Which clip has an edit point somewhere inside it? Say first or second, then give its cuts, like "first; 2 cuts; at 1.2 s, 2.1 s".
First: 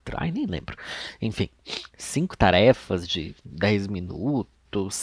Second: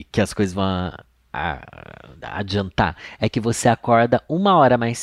first; 1 cut; at 3.4 s